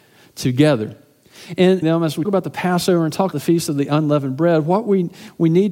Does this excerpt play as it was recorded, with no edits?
no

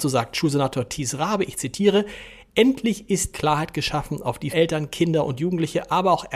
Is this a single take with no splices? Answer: no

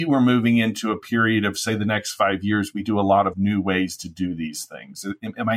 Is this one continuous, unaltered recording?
no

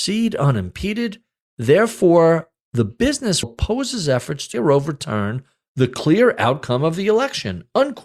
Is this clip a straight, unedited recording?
no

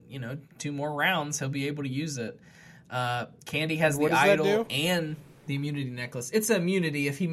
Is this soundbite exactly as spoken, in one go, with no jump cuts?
yes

